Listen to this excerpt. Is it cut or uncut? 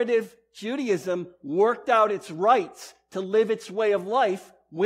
uncut